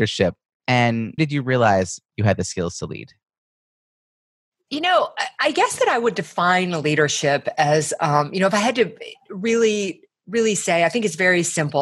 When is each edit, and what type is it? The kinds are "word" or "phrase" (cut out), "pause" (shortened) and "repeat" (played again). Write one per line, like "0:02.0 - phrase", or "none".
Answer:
0:01.2 - word